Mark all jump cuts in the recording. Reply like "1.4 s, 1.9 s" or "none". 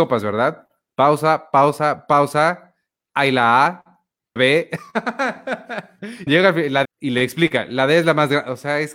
4.4 s, 6.3 s, 6.8 s